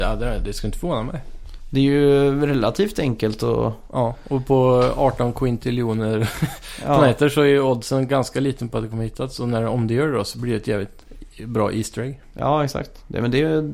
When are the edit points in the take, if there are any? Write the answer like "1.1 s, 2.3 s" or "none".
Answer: none